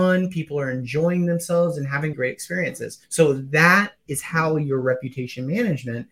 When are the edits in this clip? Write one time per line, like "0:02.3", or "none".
0:02.1
0:03.0